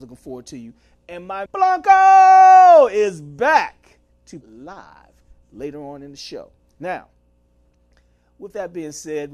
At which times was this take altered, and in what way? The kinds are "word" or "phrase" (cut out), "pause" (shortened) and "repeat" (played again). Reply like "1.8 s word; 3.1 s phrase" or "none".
1.5 s word; 4.4 s word; 6.6 s pause